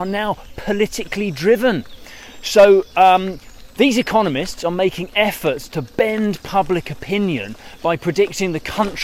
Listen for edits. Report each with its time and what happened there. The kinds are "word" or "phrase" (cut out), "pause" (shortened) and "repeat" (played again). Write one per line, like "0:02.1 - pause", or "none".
none